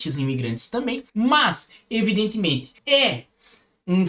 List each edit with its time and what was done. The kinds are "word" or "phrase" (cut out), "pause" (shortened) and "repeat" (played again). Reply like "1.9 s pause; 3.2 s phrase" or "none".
1.1 s pause; 2.8 s pause